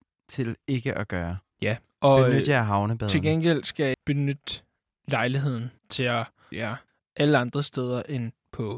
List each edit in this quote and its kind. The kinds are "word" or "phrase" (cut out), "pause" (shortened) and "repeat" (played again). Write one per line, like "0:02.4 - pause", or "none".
0:03.9 - word
0:05.8 - pause
0:06.5 - word
0:06.9 - pause